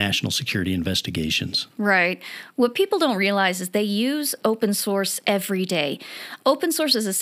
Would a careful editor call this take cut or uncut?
uncut